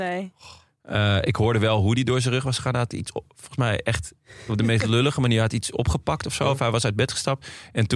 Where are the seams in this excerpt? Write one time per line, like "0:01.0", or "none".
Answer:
none